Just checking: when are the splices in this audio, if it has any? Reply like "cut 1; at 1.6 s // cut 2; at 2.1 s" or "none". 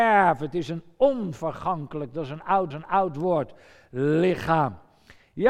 cut 1; at 2.7 s

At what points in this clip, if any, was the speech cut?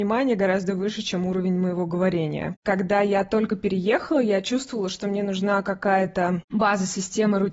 none

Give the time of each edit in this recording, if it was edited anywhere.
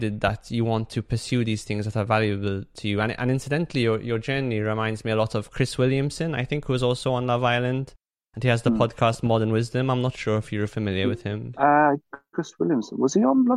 none

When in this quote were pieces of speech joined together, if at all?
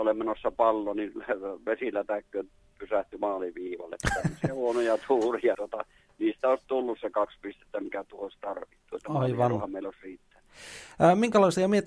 cut 1; at 5.5 s

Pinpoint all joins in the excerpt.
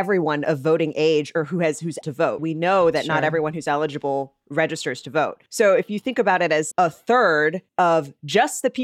cut 1; at 2.0 s // cut 2; at 2.4 s // cut 3; at 5.5 s // cut 4; at 6.7 s // cut 5; at 7.7 s

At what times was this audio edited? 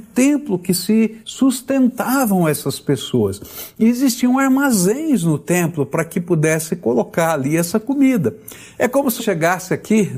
cut 1; at 1.2 s // cut 2; at 9.2 s

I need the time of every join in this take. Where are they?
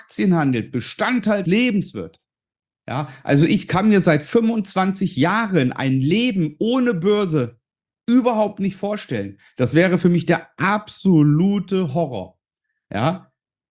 cut 1; at 1.4 s

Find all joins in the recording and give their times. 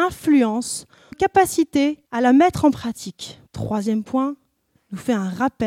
cut 1; at 1.1 s // cut 2; at 2.1 s // cut 3; at 3.5 s // cut 4; at 4.8 s

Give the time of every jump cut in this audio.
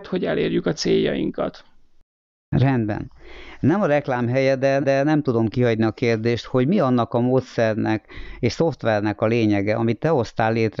cut 1; at 4.8 s

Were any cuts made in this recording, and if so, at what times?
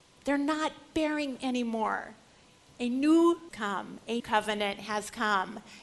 cut 1; at 1.4 s // cut 2; at 2.6 s // cut 3; at 3.5 s // cut 4; at 4.2 s

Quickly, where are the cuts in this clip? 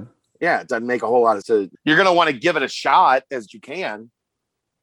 cut 1; at 1.4 s // cut 2; at 1.7 s // cut 3; at 3.5 s

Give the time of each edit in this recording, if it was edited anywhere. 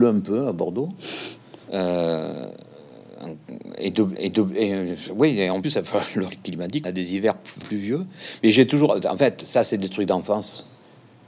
cut 1; at 1.6 s // cut 2; at 4.1 s // cut 3; at 5.6 s // cut 4; at 6.3 s // cut 5; at 6.8 s // cut 6; at 7.6 s

